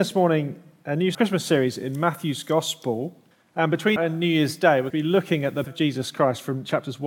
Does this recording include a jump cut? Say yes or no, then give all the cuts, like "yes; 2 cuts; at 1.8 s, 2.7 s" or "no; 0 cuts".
yes; 5 cuts; at 1.1 s, 3.3 s, 4.0 s, 4.9 s, 5.6 s